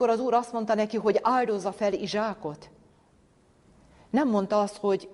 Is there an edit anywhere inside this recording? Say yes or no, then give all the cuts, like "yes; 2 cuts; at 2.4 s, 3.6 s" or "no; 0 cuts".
no; 0 cuts